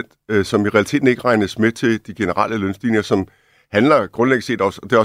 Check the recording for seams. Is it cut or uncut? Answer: uncut